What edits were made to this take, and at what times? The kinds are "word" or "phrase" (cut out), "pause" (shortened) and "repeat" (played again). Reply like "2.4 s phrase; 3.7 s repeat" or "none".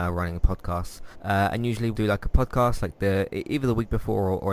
1.1 s pause; 1.9 s word; 2.3 s word